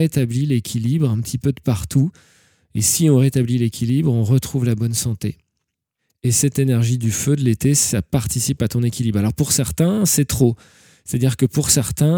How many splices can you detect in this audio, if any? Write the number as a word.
zero